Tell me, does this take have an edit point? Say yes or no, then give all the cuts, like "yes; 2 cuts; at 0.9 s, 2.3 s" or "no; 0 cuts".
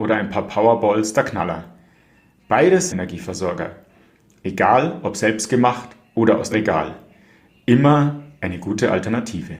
yes; 2 cuts; at 2.9 s, 6.5 s